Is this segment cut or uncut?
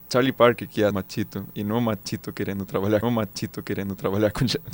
cut